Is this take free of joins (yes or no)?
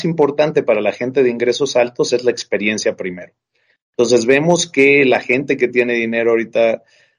yes